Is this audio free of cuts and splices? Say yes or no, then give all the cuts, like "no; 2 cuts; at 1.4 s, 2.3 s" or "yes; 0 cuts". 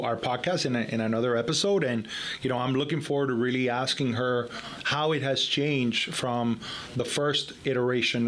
yes; 0 cuts